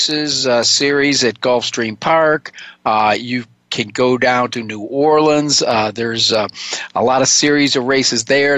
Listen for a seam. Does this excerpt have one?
no; 0 cuts

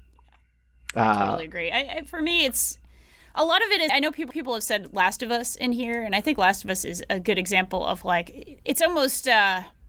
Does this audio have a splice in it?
yes; 2 cuts; at 3.9 s, 4.3 s

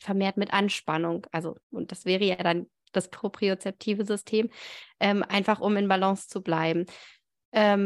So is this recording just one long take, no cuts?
no; 1 cut; at 1.6 s

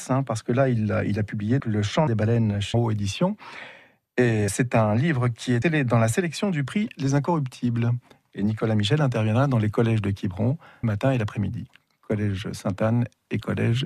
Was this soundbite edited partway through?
yes; 6 cuts; at 1.6 s, 2.1 s, 2.7 s, 4.5 s, 5.6 s, 10.8 s

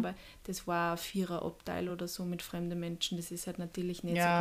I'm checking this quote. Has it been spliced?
no; 0 cuts

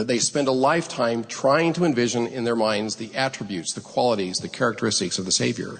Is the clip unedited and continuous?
yes; 0 cuts

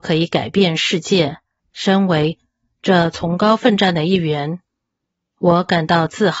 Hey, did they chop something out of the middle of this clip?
yes; 1 cut; at 1.6 s

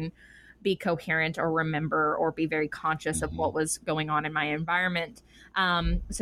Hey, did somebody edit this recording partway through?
no; 0 cuts

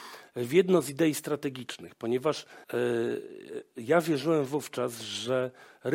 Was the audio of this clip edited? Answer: yes; 1 cut; at 2.6 s

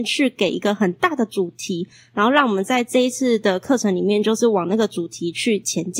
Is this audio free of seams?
yes; 0 cuts

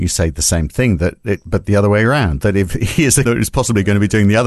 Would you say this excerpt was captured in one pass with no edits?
no; 1 cut; at 3.2 s

